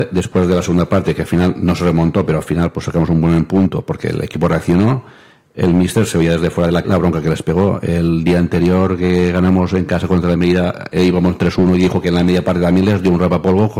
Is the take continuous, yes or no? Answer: no